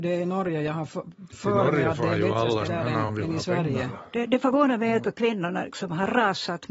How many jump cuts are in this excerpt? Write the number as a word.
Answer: four